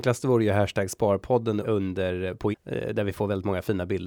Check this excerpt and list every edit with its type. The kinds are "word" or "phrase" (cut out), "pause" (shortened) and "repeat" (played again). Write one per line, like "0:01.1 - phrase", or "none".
0:01.6 - word
0:02.5 - word